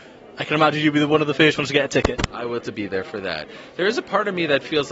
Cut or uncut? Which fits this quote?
cut